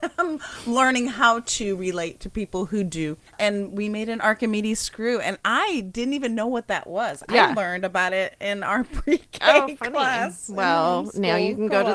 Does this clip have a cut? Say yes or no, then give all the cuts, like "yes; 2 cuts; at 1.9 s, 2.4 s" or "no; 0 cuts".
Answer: yes; 1 cut; at 3.3 s